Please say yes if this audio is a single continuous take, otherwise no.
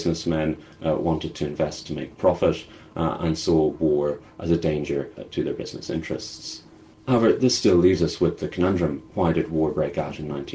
yes